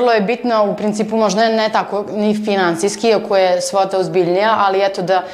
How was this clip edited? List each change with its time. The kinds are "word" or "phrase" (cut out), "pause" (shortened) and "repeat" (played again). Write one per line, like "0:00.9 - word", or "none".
none